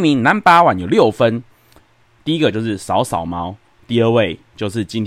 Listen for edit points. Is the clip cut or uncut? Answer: uncut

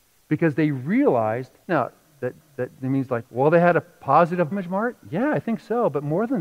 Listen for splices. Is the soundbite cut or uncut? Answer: cut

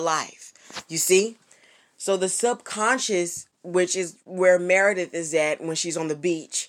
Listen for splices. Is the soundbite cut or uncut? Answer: uncut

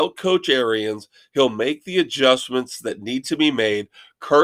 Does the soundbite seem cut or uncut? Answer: uncut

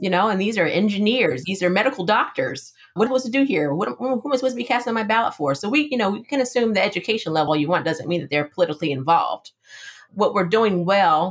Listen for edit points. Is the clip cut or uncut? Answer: cut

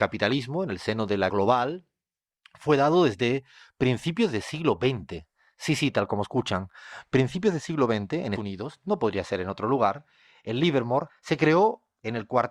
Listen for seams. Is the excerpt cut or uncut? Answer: cut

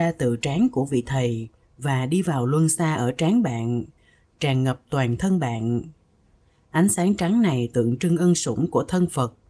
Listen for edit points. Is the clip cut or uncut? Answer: uncut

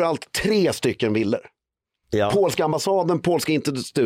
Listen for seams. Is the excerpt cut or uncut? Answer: uncut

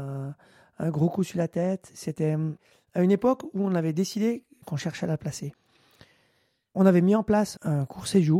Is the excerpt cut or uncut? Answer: uncut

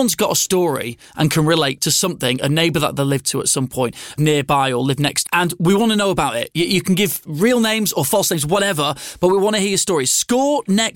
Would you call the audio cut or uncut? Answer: cut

